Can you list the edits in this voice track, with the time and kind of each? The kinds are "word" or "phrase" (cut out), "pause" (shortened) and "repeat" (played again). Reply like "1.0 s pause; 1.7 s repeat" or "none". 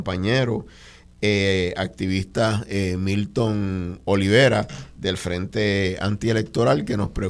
none